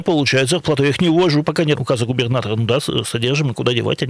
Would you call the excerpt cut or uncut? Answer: cut